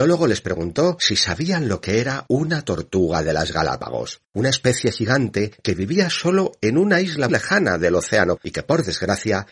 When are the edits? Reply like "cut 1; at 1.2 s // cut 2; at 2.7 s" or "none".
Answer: cut 1; at 4.2 s // cut 2; at 7.3 s // cut 3; at 8.4 s